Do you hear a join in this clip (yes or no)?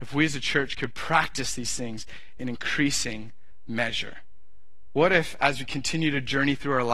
no